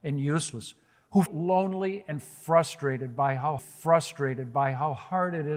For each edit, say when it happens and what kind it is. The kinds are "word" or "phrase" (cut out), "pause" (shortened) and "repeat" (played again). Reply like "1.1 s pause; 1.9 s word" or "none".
1.3 s word; 3.6 s repeat

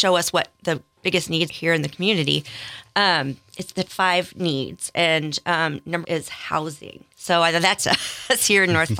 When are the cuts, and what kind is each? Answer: 0.9 s pause; 1.5 s word; 3.9 s word; 6.0 s word; 7.1 s pause; 7.8 s phrase

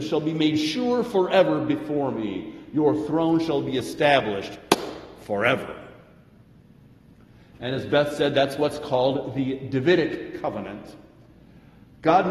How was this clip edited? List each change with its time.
none

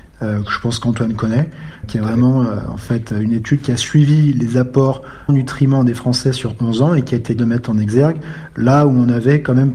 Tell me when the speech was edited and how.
1.8 s word; 5.3 s word; 7.4 s word

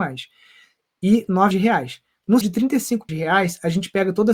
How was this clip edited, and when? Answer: 1.5 s word; 2.4 s word; 3.1 s word

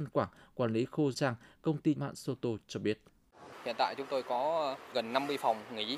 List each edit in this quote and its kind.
1.1 s phrase; 2.0 s phrase

